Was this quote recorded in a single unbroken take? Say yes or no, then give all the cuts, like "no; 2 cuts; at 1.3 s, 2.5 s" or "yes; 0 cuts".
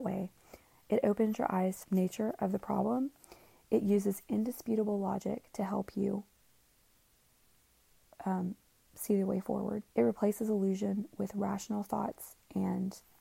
no; 2 cuts; at 1.8 s, 9.9 s